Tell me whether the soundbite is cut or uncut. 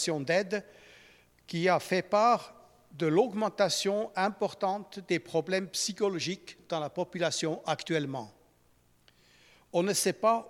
uncut